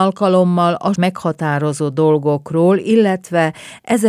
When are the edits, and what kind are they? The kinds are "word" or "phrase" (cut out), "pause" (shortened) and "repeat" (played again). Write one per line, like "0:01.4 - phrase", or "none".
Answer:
0:00.9 - word